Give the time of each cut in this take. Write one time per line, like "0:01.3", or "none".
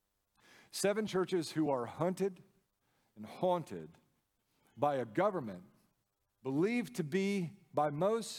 none